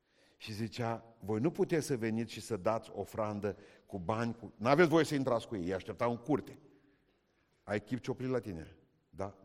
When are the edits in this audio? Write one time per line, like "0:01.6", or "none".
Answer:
none